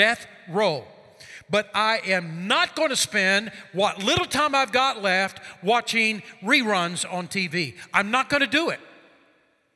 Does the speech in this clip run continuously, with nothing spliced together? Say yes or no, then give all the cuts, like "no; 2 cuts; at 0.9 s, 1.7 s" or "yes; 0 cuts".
yes; 0 cuts